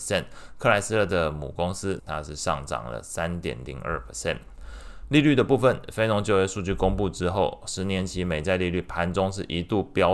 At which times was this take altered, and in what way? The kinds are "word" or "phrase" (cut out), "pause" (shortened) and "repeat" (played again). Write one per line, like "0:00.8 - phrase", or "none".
0:02.0 - word

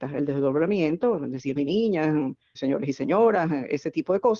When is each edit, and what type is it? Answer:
0:01.6 - word
0:02.6 - word

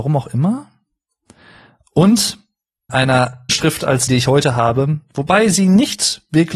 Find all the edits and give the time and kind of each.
0:02.9 - word
0:03.5 - phrase
0:04.1 - word

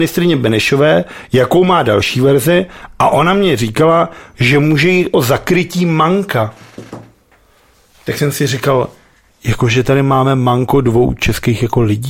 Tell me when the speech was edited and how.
none

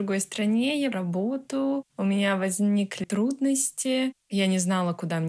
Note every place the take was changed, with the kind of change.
0:00.9 - word
0:03.0 - phrase

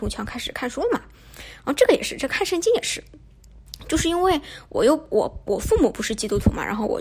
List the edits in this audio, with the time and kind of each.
none

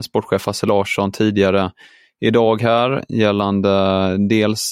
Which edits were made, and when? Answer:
none

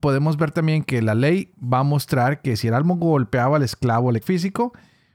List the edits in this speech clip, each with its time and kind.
0:04.2 - phrase

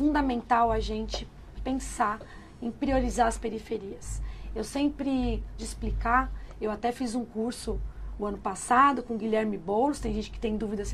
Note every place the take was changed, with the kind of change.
0:01.6 - word
0:05.6 - word

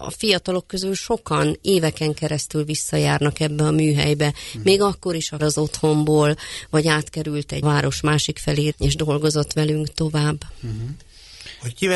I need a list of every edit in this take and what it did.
0:05.4 - phrase
0:07.6 - phrase
0:08.7 - phrase

